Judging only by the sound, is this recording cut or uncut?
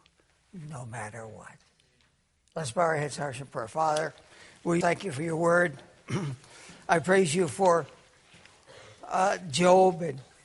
cut